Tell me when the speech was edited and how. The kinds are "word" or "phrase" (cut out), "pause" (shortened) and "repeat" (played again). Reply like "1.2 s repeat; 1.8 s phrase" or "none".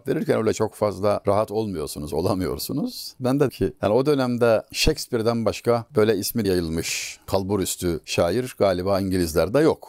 3.5 s word; 6.4 s word